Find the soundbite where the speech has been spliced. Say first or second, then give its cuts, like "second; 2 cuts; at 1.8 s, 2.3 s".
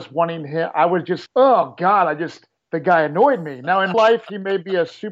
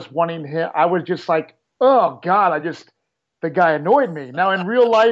first; 3 cuts; at 1.3 s, 2.6 s, 3.9 s